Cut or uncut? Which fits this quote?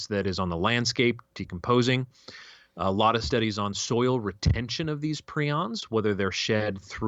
uncut